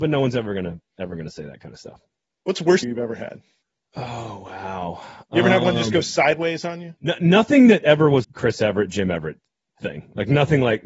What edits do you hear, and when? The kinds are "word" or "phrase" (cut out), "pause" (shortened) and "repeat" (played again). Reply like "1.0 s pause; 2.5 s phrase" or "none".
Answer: 2.8 s word; 7.0 s pause; 8.2 s word